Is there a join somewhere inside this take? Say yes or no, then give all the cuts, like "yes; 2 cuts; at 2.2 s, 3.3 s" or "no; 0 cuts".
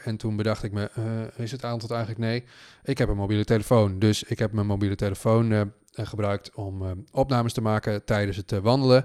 no; 0 cuts